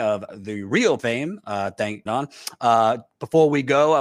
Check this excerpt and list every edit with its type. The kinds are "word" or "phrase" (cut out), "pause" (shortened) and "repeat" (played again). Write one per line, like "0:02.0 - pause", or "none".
0:01.0 - word
0:02.1 - phrase